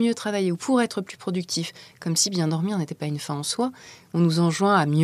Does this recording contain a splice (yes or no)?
no